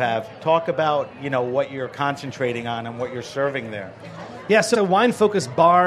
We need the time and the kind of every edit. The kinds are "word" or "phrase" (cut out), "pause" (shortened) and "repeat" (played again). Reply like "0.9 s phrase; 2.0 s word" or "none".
4.7 s word